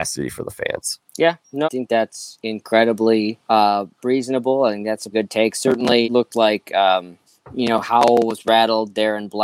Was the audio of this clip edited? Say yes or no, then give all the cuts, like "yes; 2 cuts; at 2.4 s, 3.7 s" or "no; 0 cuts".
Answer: yes; 6 cuts; at 1.1 s, 1.6 s, 3.4 s, 5.1 s, 6.0 s, 7.3 s